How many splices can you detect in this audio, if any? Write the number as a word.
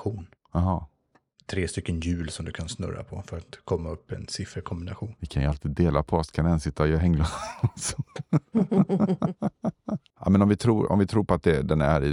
one